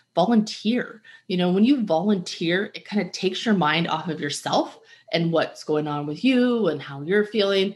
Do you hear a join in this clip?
no; 0 cuts

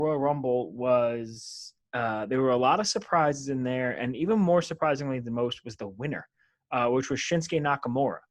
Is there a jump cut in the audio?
no; 0 cuts

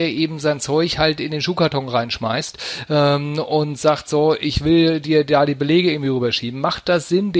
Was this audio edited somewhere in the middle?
no; 0 cuts

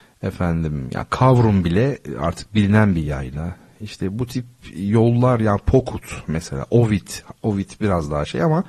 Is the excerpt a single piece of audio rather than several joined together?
yes; 0 cuts

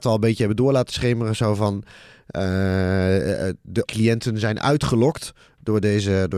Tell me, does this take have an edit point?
yes; 1 cut; at 3.8 s

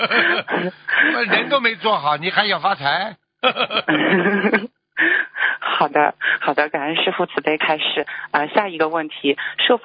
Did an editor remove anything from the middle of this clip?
no; 0 cuts

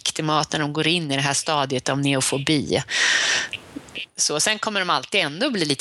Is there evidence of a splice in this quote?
no; 0 cuts

